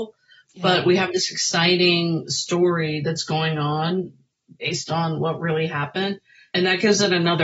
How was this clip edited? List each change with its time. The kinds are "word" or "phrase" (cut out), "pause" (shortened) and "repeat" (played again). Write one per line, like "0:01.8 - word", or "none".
none

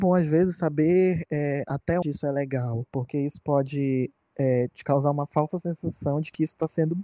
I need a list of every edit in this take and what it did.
0:02.0 - word

